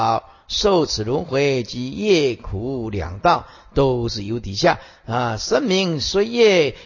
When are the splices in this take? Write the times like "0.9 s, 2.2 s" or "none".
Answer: none

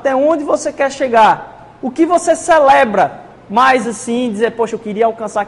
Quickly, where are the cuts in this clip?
none

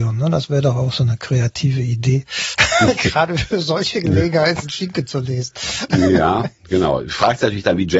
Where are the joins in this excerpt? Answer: 4.6 s

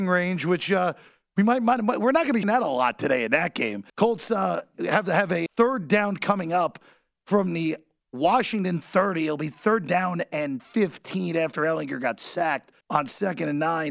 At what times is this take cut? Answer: 2.4 s, 3.9 s, 5.5 s, 12.8 s

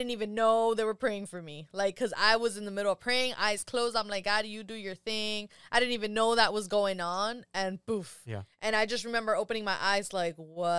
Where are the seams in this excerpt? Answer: none

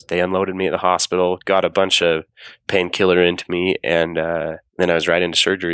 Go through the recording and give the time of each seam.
none

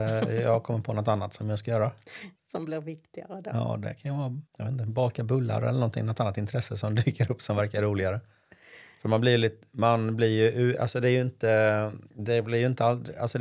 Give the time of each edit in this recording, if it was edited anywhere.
2.4 s, 4.5 s

